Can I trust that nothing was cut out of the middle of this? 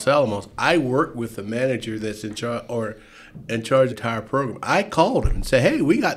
no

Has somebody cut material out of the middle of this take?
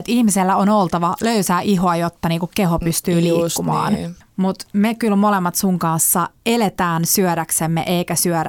no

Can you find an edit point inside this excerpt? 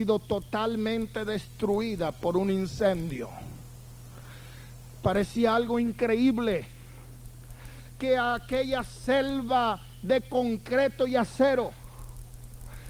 no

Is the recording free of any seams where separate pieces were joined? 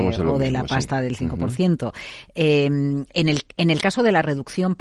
yes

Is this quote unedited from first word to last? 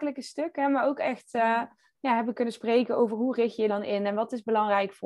no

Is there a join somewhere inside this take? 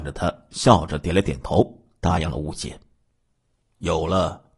no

